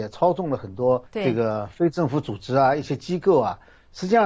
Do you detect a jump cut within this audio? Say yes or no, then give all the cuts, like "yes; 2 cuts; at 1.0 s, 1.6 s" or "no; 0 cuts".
yes; 1 cut; at 1.1 s